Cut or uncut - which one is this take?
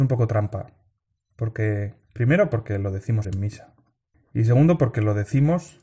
cut